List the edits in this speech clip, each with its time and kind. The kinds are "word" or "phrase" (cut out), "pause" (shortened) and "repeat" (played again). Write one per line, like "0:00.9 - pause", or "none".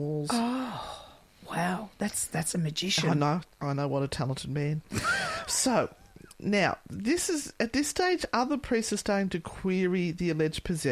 0:01.3 - pause
0:03.5 - pause
0:06.3 - pause